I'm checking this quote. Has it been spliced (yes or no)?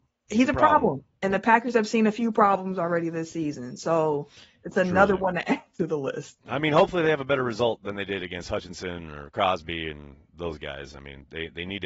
no